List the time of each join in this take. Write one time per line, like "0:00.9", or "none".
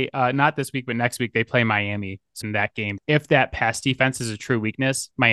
0:02.4
0:03.0